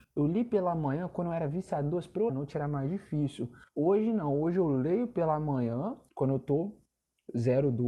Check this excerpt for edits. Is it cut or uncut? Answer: cut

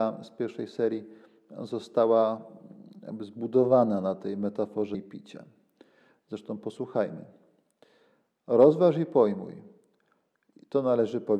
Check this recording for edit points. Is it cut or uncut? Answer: cut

